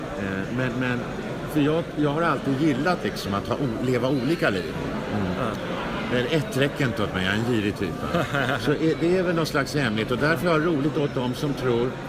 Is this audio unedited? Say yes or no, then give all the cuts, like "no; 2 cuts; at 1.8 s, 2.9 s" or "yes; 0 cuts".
yes; 0 cuts